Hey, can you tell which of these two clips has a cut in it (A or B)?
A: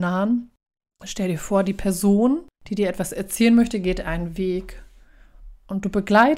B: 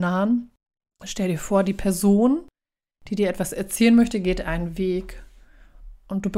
A